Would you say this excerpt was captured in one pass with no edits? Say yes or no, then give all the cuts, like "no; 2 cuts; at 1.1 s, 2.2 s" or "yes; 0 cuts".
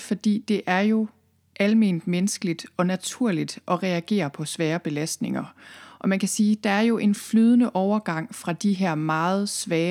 yes; 0 cuts